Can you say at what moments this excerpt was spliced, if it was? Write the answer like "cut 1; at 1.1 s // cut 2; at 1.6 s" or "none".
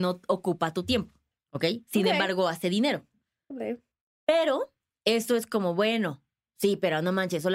none

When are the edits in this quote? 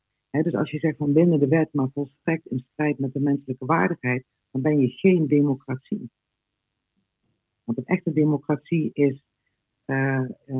none

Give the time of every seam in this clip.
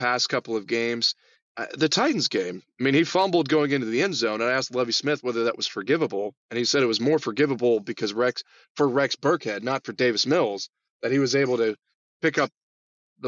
none

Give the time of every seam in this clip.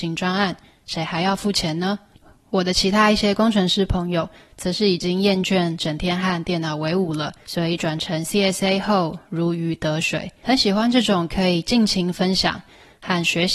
none

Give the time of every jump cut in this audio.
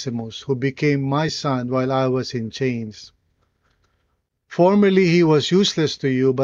none

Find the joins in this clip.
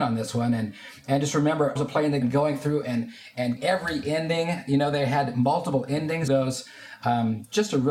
cut 1; at 1.8 s // cut 2; at 2.2 s // cut 3; at 3.6 s // cut 4; at 6.3 s

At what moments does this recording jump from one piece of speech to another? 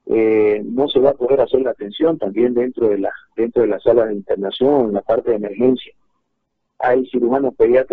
none

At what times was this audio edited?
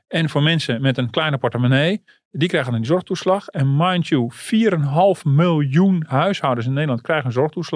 none

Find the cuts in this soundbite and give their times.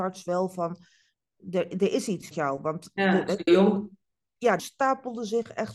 cut 1; at 2.3 s // cut 2; at 3.5 s // cut 3; at 4.6 s

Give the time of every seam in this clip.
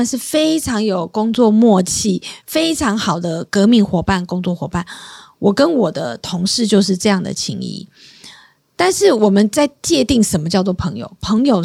none

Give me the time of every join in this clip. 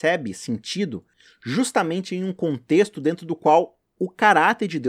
none

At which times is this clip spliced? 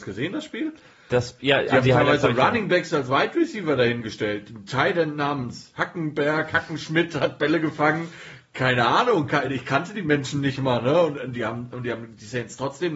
none

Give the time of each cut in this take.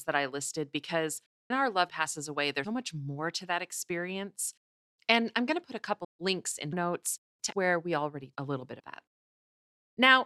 cut 1; at 1.5 s // cut 2; at 1.9 s // cut 3; at 2.6 s // cut 4; at 6.0 s // cut 5; at 6.7 s // cut 6; at 7.5 s // cut 7; at 8.3 s // cut 8; at 8.8 s

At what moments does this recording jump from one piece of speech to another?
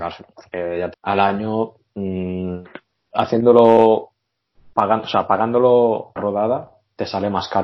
cut 1; at 0.9 s // cut 2; at 6.2 s

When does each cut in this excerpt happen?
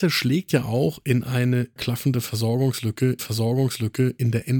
cut 1; at 1.8 s // cut 2; at 3.2 s

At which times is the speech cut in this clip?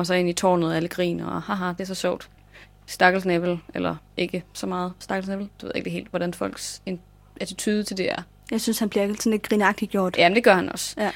none

